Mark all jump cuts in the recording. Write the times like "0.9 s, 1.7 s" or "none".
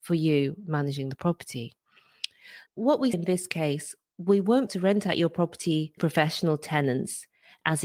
2.7 s, 3.1 s, 4.7 s, 6.0 s